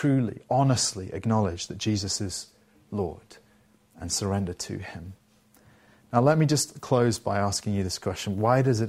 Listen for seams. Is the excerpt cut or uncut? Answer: uncut